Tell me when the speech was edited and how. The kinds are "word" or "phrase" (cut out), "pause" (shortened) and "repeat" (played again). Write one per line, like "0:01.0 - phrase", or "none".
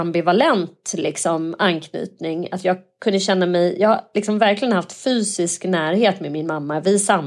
none

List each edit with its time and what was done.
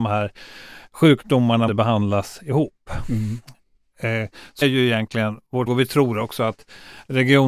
0:01.7 - word
0:04.6 - word
0:05.7 - word

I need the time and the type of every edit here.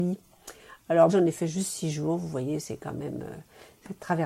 0:01.1 - word

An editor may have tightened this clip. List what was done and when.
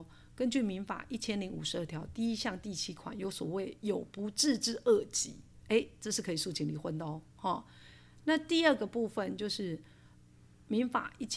0:07.3 - pause

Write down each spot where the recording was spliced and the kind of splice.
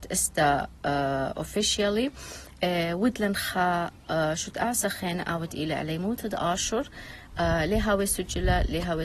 none

